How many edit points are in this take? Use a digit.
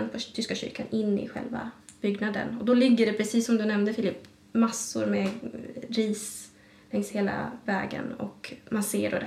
0